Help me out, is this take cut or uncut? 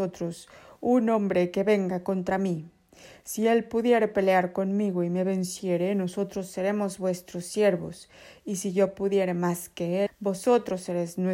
cut